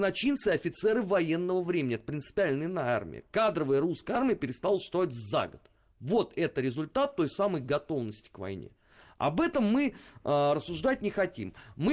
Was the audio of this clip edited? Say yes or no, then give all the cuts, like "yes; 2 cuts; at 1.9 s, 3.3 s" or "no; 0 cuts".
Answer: no; 0 cuts